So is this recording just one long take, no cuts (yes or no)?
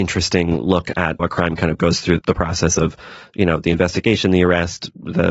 no